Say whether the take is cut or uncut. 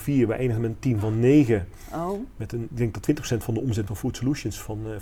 cut